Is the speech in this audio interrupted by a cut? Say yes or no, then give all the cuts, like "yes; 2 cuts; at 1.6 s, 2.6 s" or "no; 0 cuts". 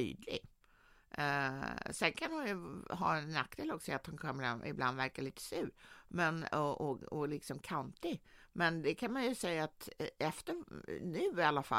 no; 0 cuts